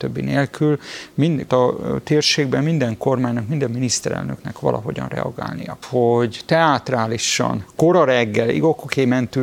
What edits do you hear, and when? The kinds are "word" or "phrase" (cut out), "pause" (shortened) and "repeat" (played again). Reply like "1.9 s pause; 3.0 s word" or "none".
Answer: 1.5 s phrase; 5.8 s phrase